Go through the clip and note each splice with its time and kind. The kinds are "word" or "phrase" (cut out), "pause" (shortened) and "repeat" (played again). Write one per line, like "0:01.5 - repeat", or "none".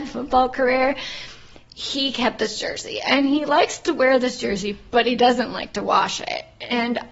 none

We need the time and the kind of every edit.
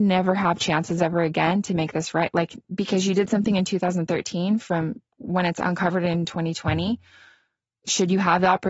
0:02.6 - pause

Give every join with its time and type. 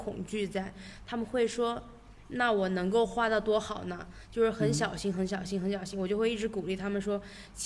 none

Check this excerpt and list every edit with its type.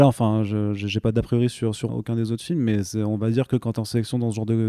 0:01.9 - word

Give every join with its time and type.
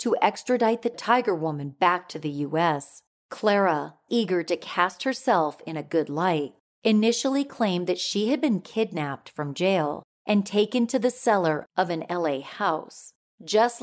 0:04.1 - word

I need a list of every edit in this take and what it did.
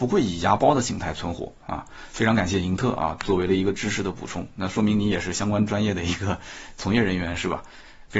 0:01.6 - pause

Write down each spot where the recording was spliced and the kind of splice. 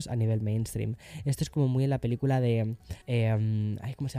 0:03.0 - pause

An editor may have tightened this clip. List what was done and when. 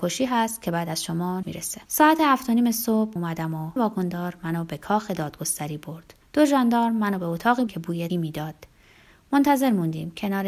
0:01.4 - word
0:01.9 - pause
0:03.2 - word
0:03.8 - word
0:06.2 - pause
0:07.7 - word
0:08.1 - word

